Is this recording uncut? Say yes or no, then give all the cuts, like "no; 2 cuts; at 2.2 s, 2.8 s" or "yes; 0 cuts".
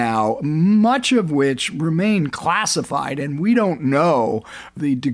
yes; 0 cuts